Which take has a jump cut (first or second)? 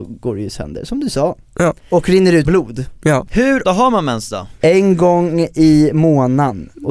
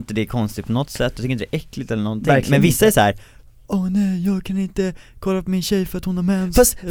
first